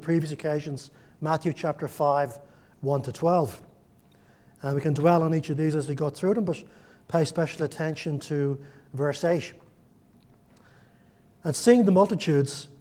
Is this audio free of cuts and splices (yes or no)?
yes